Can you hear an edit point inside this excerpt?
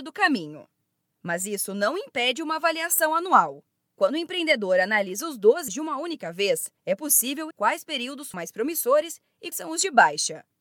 yes; 5 cuts; at 5.7 s, 6.8 s, 7.5 s, 8.3 s, 9.5 s

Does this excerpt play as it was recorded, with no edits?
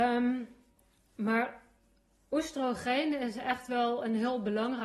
yes; 0 cuts

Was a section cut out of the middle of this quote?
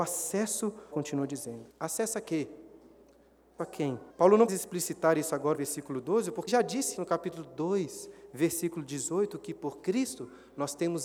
yes; 8 cuts; at 0.9 s, 1.7 s, 3.6 s, 4.1 s, 4.5 s, 5.5 s, 6.5 s, 7.0 s

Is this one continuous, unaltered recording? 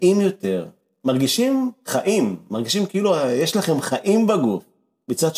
yes; 0 cuts

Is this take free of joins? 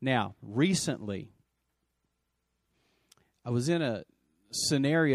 yes; 0 cuts

